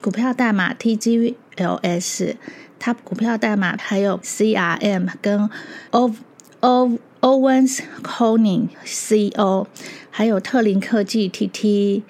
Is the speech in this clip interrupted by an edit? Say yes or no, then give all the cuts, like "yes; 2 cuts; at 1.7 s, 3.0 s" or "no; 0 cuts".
yes; 5 cuts; at 3.0 s, 3.8 s, 4.2 s, 5.9 s, 8.7 s